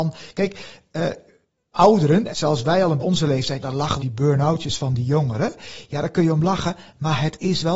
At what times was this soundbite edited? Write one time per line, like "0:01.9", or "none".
0:01.7
0:02.3
0:03.0
0:03.6
0:04.0